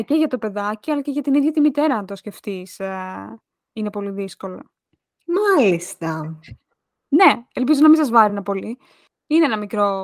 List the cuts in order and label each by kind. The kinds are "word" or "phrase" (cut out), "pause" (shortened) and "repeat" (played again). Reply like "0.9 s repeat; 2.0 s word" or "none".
none